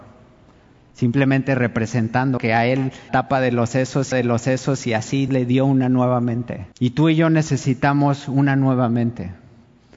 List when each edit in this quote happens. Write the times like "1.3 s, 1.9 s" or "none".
2.4 s, 3.1 s, 4.1 s, 5.3 s, 6.7 s